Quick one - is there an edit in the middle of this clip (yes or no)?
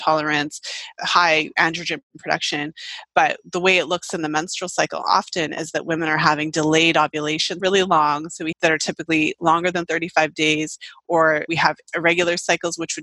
yes